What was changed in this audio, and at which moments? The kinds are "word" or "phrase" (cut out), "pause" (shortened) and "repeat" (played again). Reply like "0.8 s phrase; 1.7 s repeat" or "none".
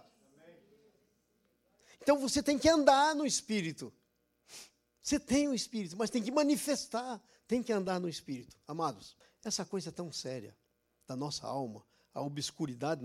9.2 s pause